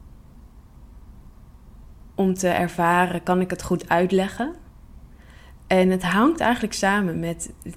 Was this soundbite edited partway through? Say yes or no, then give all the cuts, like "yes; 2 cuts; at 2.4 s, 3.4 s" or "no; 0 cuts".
no; 0 cuts